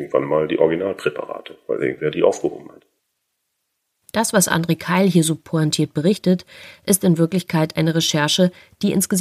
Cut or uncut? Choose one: uncut